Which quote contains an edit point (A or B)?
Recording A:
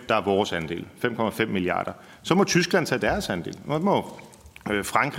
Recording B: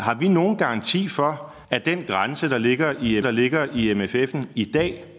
B